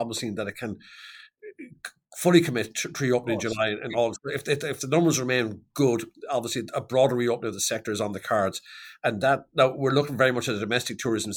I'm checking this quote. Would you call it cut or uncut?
uncut